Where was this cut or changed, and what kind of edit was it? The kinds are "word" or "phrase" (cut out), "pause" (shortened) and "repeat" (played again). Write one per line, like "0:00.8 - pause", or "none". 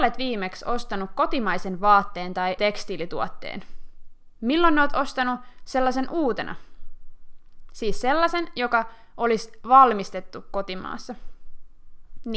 0:02.6 - word